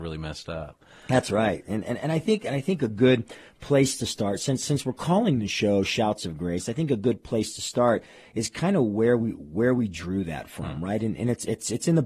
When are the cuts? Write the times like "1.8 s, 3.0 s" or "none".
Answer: none

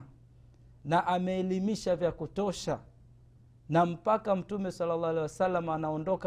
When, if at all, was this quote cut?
none

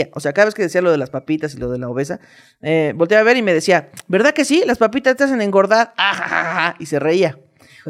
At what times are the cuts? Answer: none

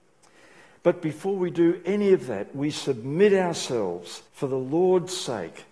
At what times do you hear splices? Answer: 4.3 s

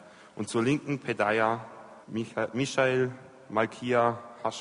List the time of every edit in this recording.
2.0 s

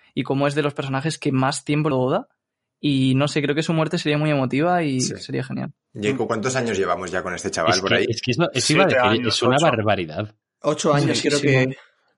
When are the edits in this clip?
1.9 s

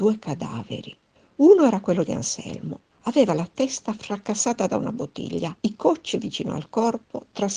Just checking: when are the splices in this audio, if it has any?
1.1 s, 2.9 s, 5.6 s, 6.1 s

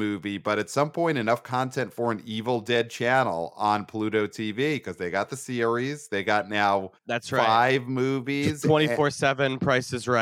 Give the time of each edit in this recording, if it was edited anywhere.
7.0 s

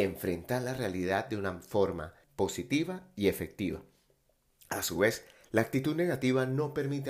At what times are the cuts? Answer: 2.2 s

